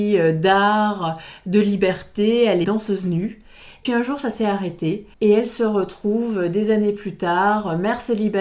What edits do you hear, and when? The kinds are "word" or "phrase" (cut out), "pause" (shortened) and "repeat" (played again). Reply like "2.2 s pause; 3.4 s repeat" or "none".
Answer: 2.6 s word; 3.9 s word; 5.1 s pause